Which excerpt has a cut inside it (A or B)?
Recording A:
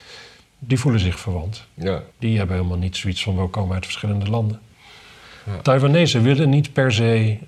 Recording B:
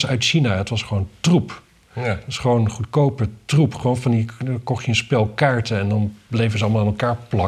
A